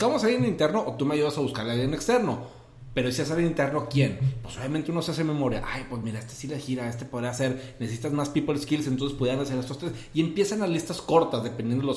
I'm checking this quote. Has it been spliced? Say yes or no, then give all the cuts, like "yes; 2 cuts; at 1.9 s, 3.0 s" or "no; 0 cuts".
no; 0 cuts